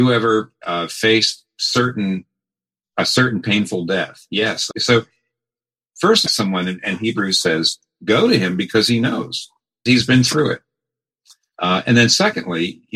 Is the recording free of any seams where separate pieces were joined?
no; 3 cuts; at 4.7 s, 6.3 s, 9.9 s

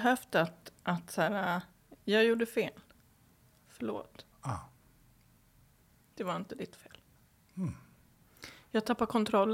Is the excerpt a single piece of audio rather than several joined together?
yes; 0 cuts

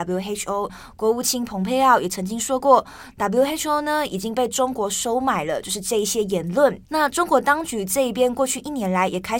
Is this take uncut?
no; 1 cut; at 6.8 s

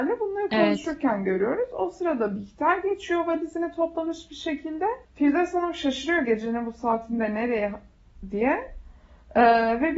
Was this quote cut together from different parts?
yes; 1 cut; at 5.0 s

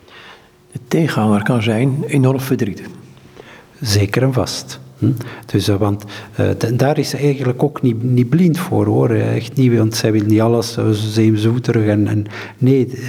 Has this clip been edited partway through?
no; 0 cuts

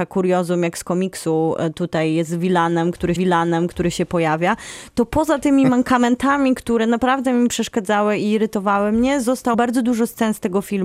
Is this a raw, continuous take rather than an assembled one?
no; 2 cuts; at 3.2 s, 9.5 s

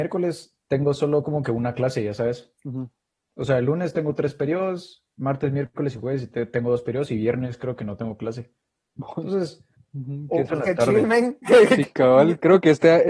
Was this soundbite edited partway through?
yes; 3 cuts; at 9.8 s, 10.5 s, 11.8 s

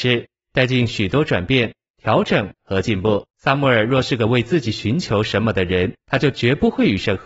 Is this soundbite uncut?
no; 2 cuts; at 3.3 s, 6.0 s

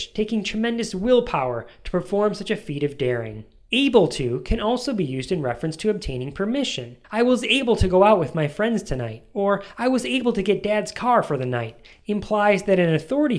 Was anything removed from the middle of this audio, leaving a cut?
no; 0 cuts

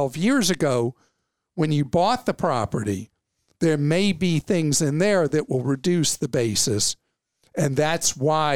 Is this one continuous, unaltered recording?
yes; 0 cuts

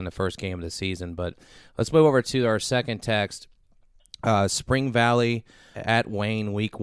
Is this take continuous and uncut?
no; 1 cut; at 5.7 s

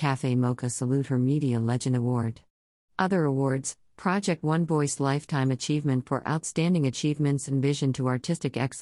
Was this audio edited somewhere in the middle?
no; 0 cuts

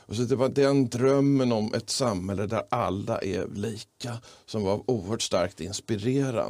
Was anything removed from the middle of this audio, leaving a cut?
no; 0 cuts

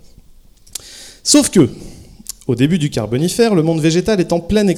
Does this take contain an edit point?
no; 0 cuts

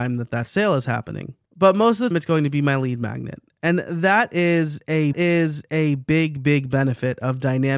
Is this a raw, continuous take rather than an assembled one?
no; 3 cuts; at 1.4 s, 2.1 s, 5.1 s

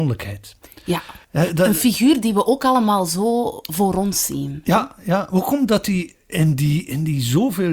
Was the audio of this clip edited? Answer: yes; 1 cut; at 1.2 s

